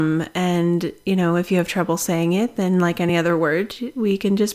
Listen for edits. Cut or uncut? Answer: uncut